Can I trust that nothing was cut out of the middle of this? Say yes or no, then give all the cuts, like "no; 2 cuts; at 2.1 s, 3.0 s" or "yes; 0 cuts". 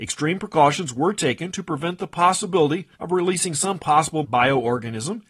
no; 2 cuts; at 2.9 s, 4.2 s